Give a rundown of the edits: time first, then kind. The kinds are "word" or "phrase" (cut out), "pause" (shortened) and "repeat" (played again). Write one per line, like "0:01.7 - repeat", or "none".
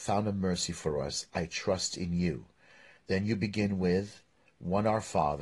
none